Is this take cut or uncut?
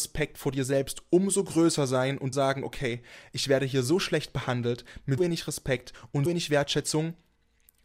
cut